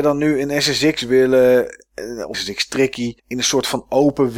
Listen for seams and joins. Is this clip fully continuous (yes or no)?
no